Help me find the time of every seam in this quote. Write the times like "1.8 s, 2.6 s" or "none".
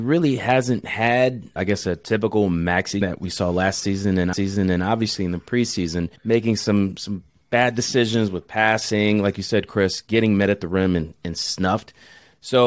1.6 s, 3.0 s, 4.3 s, 6.2 s